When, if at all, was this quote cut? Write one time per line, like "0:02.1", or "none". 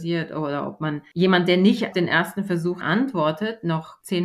0:01.9
0:02.8